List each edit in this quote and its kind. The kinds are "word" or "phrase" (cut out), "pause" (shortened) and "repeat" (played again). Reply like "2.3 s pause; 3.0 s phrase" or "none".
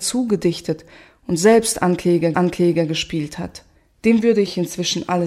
2.3 s repeat; 3.8 s pause

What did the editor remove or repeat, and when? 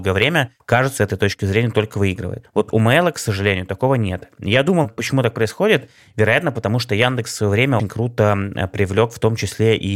1.0 s phrase; 7.8 s word

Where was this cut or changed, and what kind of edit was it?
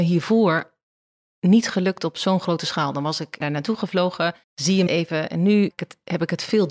3.4 s phrase; 4.4 s pause; 4.9 s word; 5.7 s phrase

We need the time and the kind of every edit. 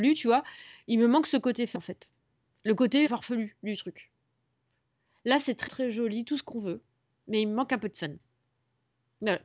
1.7 s word; 3.1 s word; 5.7 s word

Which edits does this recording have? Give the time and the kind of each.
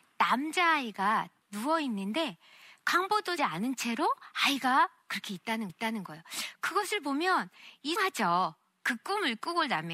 1.4 s word; 3.4 s phrase; 5.7 s repeat; 8.0 s phrase

